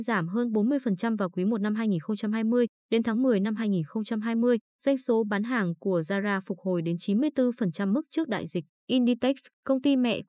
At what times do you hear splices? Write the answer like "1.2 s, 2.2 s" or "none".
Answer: 8.7 s